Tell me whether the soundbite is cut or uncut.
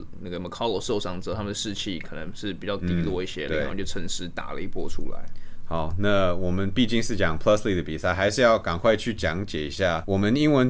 uncut